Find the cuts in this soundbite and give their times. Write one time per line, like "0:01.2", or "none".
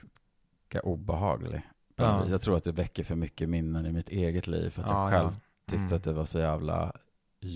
none